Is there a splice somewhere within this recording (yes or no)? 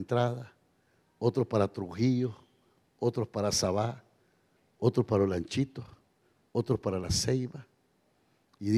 no